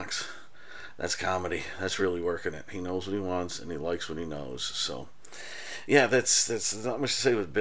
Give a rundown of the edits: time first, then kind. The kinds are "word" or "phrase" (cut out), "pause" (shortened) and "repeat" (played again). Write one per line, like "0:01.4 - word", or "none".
none

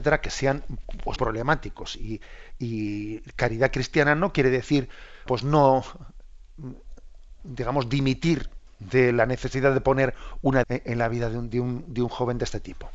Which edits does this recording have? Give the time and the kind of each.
0:01.2 - word
0:05.3 - word
0:10.6 - word

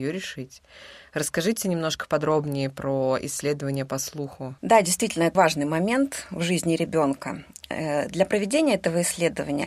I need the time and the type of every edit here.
0:04.6 - pause
0:05.3 - word

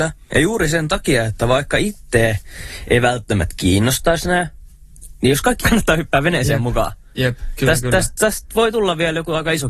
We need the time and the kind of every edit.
0:05.6 - phrase

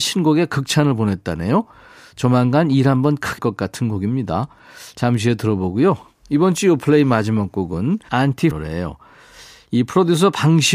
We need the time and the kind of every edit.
0:03.4 - word
0:08.1 - word
0:08.5 - word

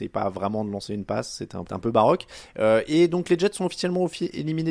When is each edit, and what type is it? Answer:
0:01.7 - phrase

